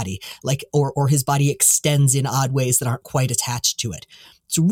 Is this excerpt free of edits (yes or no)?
yes